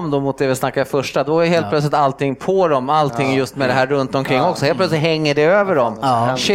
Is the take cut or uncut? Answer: uncut